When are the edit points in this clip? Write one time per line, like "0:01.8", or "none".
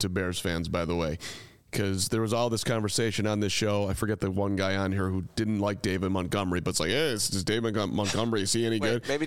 none